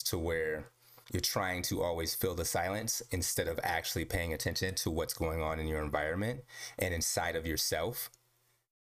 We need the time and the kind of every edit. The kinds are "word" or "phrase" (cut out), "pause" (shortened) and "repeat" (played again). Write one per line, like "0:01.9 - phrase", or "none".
0:01.0 - pause

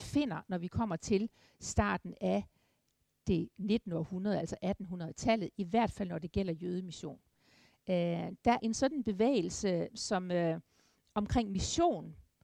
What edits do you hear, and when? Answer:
0:08.6 - word
0:09.9 - word

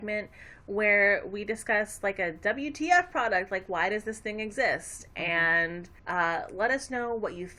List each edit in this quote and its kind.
0:06.0 - pause

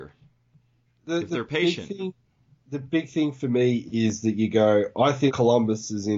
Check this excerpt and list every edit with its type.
none

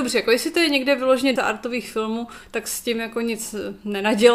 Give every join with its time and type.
0:01.4 - word

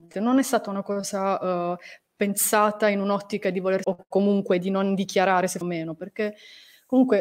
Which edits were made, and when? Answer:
0:03.8 - word
0:05.6 - phrase

